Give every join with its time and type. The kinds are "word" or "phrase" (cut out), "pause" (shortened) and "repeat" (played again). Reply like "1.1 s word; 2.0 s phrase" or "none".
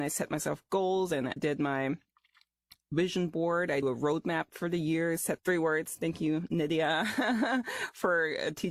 1.4 s word; 3.8 s word; 5.4 s word